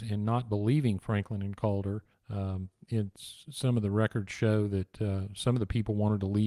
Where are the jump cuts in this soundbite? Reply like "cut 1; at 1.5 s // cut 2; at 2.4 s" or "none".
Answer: cut 1; at 2.1 s

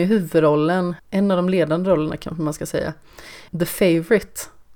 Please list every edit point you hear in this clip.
cut 1; at 1.0 s // cut 2; at 3.5 s

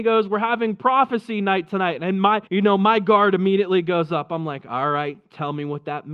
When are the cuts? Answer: cut 1; at 2.5 s

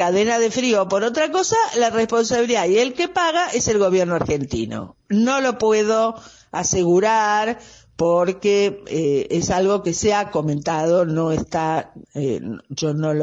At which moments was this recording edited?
cut 1; at 5.0 s // cut 2; at 12.0 s

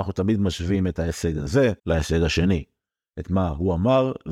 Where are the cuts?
cut 1; at 1.8 s

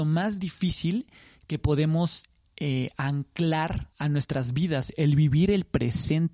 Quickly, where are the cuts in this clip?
cut 1; at 3.9 s

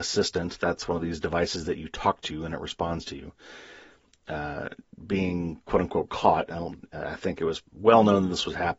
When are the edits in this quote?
cut 1; at 4.8 s // cut 2; at 7.7 s

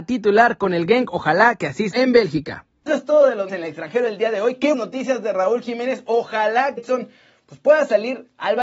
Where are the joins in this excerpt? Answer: cut 1; at 1.9 s // cut 2; at 2.9 s // cut 3; at 3.5 s // cut 4; at 4.7 s // cut 5; at 6.8 s

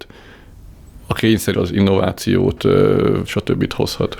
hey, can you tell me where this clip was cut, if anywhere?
cut 1; at 1.5 s // cut 2; at 3.3 s

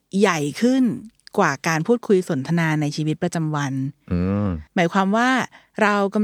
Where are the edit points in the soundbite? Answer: cut 1; at 4.7 s

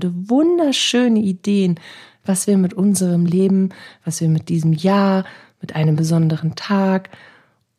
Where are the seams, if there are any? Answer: none

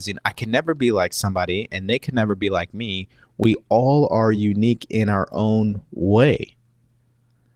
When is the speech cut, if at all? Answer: none

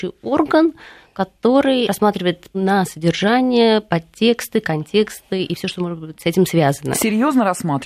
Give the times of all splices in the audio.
cut 1; at 1.9 s // cut 2; at 2.5 s

